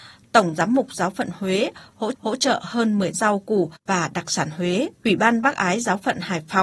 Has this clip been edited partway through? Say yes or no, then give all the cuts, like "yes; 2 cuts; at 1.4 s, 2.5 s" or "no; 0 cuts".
yes; 4 cuts; at 2.1 s, 3.1 s, 3.8 s, 4.9 s